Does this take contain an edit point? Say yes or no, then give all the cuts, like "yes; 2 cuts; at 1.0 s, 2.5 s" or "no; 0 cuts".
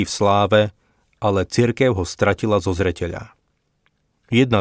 no; 0 cuts